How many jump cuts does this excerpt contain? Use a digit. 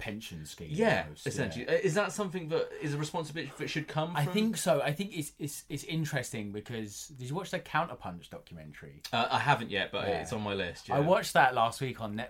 0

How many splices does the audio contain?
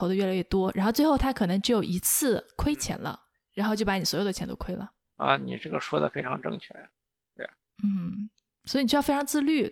0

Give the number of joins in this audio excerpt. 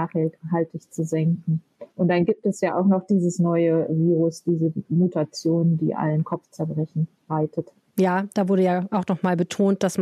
2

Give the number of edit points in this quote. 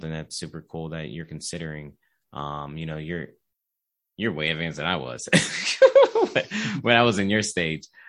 0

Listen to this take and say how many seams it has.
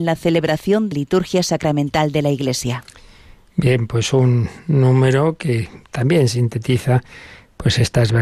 1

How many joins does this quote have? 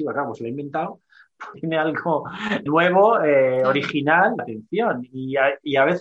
3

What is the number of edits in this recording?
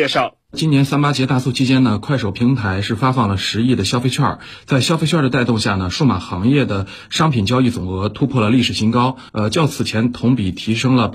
1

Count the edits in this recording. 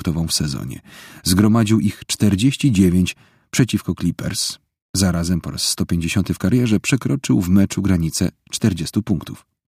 0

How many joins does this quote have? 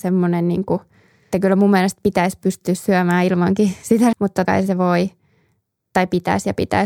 3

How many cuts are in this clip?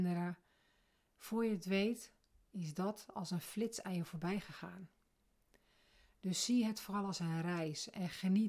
0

